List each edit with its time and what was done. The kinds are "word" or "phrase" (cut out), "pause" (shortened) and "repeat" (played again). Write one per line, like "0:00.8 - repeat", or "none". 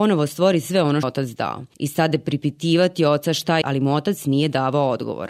0:01.0 - phrase
0:01.7 - pause
0:03.6 - phrase